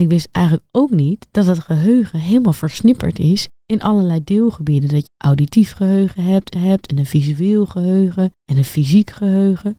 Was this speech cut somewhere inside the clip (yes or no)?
yes